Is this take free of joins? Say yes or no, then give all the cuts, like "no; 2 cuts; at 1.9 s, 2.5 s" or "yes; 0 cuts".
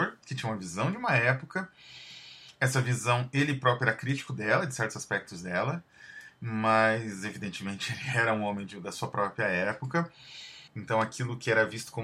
no; 1 cut; at 10.7 s